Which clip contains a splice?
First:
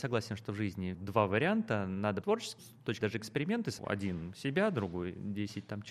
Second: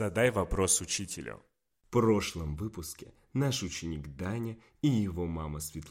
first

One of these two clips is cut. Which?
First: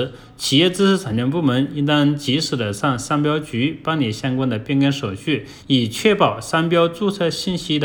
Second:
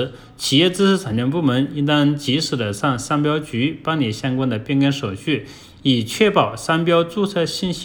first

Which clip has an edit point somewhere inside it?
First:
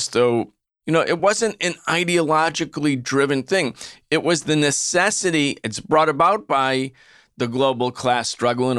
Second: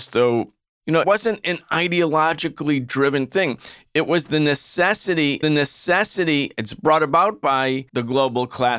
second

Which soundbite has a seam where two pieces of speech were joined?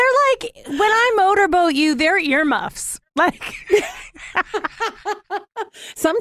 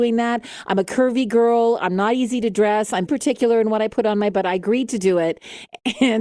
second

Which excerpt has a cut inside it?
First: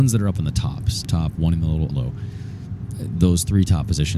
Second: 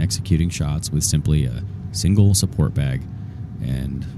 first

